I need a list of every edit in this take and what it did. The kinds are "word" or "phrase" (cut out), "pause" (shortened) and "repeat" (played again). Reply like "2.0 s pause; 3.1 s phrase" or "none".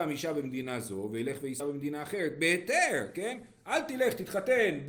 1.6 s word